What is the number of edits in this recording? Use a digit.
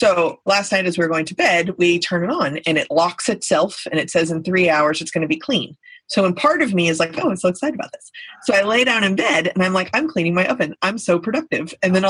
0